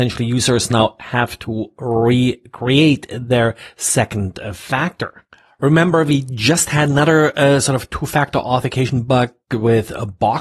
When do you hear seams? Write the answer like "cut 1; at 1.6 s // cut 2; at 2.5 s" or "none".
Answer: none